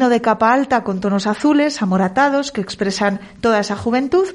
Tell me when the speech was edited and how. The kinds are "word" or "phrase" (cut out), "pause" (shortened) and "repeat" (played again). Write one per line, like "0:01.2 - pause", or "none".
none